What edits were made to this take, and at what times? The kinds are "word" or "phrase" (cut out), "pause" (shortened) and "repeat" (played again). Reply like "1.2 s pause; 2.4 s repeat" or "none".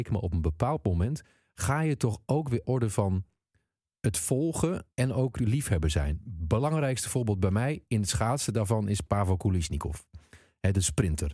2.6 s phrase; 4.9 s pause